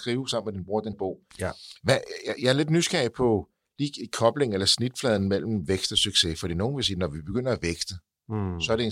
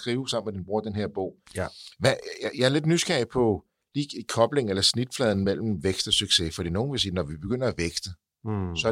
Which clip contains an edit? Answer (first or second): first